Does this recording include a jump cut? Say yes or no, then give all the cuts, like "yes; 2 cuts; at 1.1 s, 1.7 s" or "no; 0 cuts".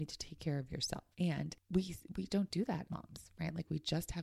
yes; 3 cuts; at 1.1 s, 2.3 s, 2.9 s